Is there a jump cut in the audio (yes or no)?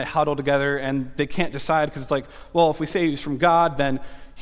no